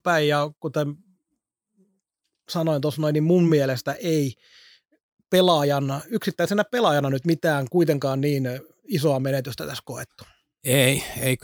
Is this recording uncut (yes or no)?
yes